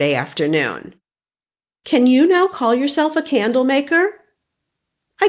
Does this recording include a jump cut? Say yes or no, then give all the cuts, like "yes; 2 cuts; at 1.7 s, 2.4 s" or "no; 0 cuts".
no; 0 cuts